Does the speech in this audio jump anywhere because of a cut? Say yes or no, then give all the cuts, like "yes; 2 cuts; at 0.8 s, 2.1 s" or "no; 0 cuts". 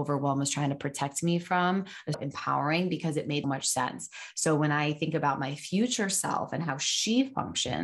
yes; 2 cuts; at 2.1 s, 3.4 s